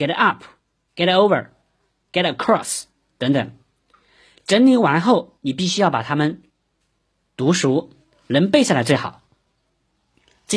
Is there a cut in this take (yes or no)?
no